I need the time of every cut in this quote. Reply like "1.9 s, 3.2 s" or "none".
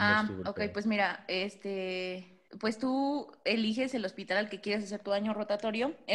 2.5 s